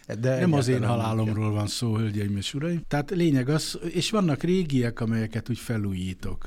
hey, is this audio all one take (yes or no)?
yes